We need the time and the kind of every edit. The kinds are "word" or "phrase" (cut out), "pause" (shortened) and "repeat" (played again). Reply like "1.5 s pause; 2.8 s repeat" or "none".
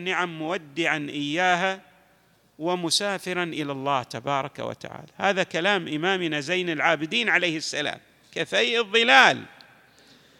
none